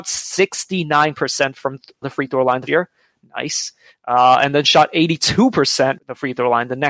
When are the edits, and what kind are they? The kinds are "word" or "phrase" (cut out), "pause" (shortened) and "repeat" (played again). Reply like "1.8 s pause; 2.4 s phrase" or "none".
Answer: 2.0 s word; 2.7 s word; 6.0 s word